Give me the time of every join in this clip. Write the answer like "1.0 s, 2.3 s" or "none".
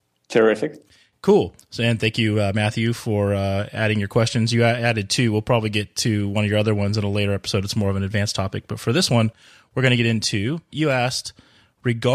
none